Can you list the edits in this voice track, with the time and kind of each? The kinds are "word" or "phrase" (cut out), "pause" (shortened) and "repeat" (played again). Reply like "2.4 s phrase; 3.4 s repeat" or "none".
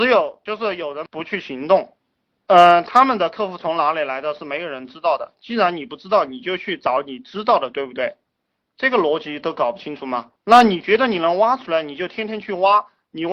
none